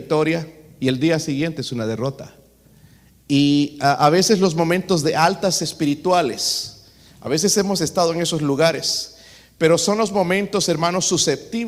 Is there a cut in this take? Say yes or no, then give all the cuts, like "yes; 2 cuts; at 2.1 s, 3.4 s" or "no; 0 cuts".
no; 0 cuts